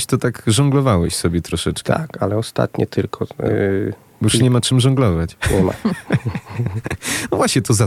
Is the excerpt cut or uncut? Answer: uncut